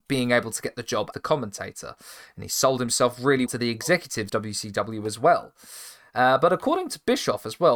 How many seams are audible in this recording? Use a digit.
3